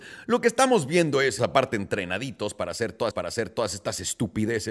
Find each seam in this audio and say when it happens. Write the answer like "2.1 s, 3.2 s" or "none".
1.4 s, 3.1 s